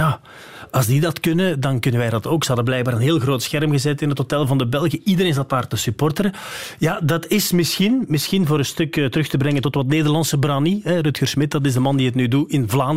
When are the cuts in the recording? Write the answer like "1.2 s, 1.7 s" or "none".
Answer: none